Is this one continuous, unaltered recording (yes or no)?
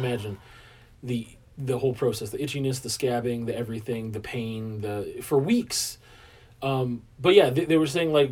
yes